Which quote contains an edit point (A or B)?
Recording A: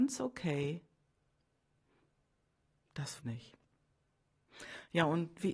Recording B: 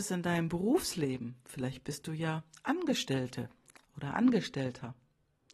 A